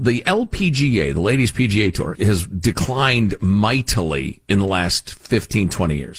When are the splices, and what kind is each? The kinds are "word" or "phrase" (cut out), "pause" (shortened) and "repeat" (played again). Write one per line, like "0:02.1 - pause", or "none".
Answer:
0:02.1 - word